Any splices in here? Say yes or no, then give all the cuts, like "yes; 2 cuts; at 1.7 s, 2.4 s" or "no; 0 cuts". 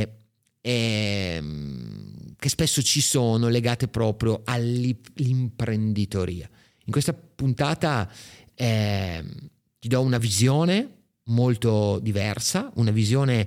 no; 0 cuts